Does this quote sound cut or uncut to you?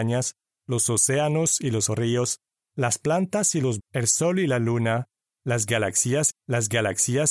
cut